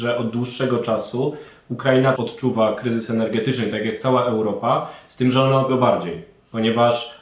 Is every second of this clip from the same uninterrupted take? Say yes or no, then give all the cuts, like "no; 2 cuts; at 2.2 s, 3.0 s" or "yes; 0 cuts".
no; 2 cuts; at 2.2 s, 5.7 s